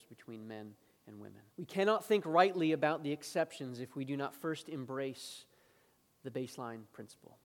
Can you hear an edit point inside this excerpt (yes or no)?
yes